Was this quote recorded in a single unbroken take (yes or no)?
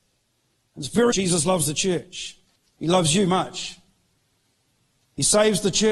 no